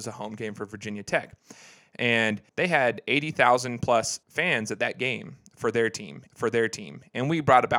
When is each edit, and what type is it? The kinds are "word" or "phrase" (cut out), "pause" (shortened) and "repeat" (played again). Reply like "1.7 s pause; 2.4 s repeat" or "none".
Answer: 2.5 s pause; 4.2 s pause; 6.3 s repeat